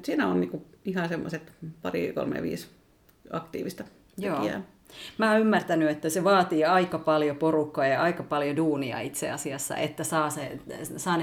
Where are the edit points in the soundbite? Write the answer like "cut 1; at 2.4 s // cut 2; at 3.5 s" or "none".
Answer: none

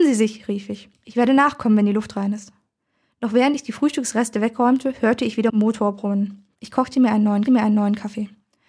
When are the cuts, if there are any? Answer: cut 1; at 0.9 s // cut 2; at 6.5 s // cut 3; at 7.4 s

